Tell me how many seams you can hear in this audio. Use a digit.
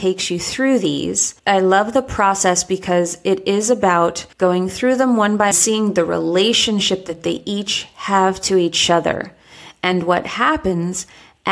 3